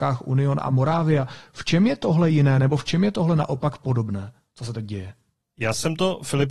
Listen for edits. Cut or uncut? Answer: uncut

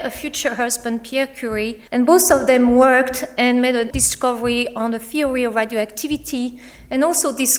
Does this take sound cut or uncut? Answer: cut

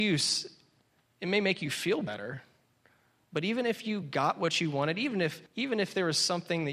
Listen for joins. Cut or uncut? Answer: cut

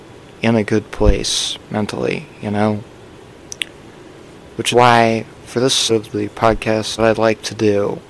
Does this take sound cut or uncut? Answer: cut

